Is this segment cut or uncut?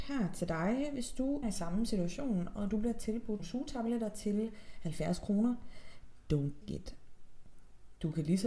cut